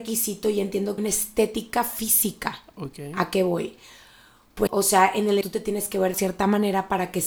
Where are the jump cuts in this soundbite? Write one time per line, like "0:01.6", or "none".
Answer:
0:01.0
0:04.7
0:05.4
0:06.1